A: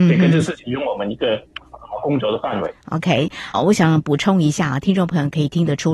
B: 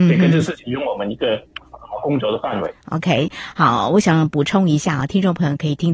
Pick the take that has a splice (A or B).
A